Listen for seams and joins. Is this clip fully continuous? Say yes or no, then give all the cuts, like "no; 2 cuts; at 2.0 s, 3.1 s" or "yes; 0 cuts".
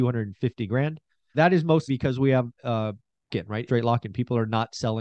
no; 4 cuts; at 1.3 s, 1.9 s, 3.3 s, 3.7 s